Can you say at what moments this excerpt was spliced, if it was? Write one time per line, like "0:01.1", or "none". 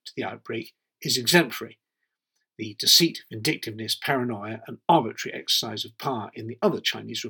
none